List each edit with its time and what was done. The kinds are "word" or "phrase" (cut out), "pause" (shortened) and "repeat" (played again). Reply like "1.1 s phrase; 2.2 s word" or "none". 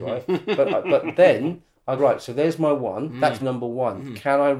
2.0 s word; 3.4 s word